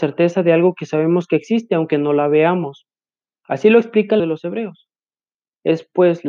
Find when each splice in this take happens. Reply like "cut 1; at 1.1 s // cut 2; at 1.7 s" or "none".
cut 1; at 4.2 s